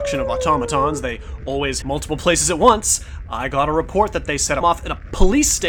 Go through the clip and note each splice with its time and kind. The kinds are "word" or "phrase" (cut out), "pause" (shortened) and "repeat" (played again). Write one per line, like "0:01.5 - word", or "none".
0:01.8 - word
0:04.6 - word